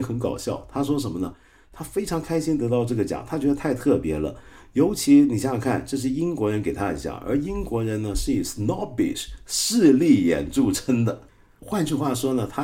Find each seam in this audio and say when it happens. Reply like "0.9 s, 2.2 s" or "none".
none